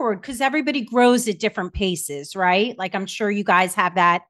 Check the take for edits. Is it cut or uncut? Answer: uncut